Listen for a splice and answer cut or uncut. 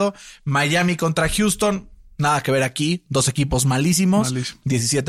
uncut